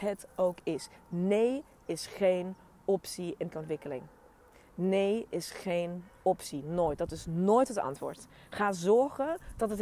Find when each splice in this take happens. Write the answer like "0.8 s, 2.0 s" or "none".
3.5 s